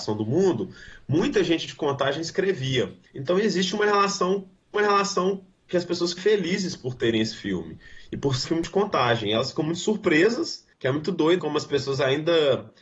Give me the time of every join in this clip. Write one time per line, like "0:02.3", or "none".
0:03.1
0:04.7
0:06.2
0:08.4
0:10.7
0:11.4